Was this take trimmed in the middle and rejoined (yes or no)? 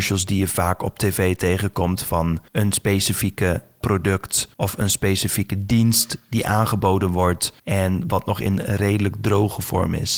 yes